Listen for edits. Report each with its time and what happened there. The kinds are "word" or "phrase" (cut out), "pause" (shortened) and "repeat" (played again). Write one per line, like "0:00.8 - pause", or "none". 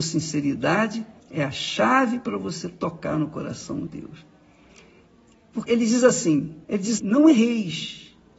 0:01.2 - pause
0:03.9 - word
0:05.7 - word
0:06.6 - pause
0:07.0 - word

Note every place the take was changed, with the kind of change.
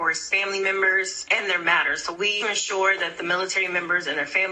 0:02.4 - phrase

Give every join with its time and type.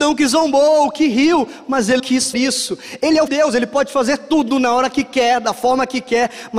0:02.0 - word
0:02.3 - word
0:03.3 - phrase

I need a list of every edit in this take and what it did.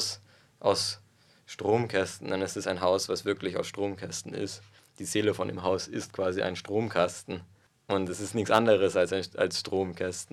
none

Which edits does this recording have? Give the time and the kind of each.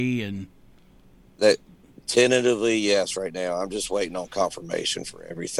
none

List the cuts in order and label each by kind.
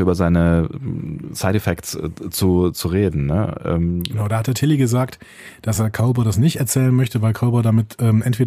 none

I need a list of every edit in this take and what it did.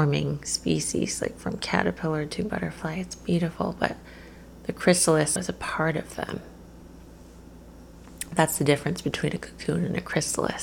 0:05.4 - word

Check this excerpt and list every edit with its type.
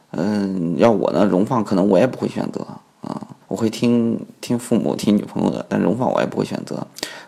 0:03.4 - pause

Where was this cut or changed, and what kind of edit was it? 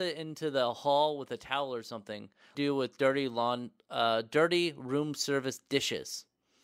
0:02.5 - phrase

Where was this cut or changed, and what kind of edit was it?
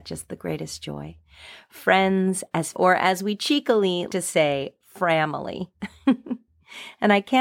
0:02.7 - word
0:04.1 - word

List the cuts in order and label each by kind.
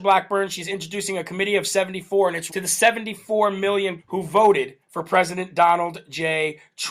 0:02.5 - word
0:04.0 - word
0:04.8 - pause

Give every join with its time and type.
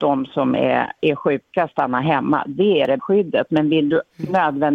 0:01.0 - word
0:01.7 - word
0:03.0 - word

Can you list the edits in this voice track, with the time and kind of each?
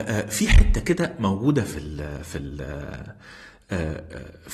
none

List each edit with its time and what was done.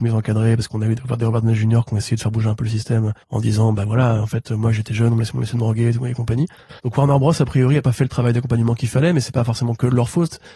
0:03.2 - pause
0:06.8 - pause

